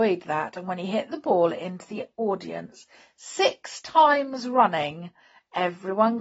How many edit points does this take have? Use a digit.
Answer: 0